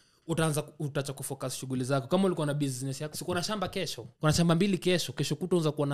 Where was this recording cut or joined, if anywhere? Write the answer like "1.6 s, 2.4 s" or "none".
3.1 s, 4.1 s